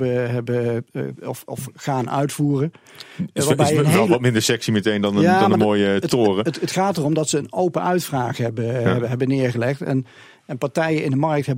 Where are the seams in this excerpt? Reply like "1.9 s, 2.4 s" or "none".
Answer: none